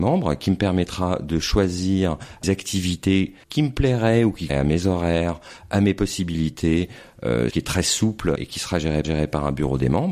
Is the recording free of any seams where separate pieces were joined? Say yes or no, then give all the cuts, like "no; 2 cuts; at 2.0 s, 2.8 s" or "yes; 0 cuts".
no; 6 cuts; at 2.4 s, 3.4 s, 4.5 s, 7.5 s, 8.4 s, 9.0 s